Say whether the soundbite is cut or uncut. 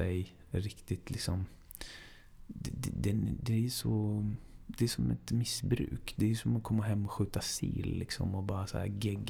uncut